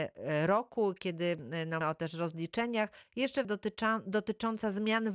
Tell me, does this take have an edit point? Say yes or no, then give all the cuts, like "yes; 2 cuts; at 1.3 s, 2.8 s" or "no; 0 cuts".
yes; 2 cuts; at 1.8 s, 3.4 s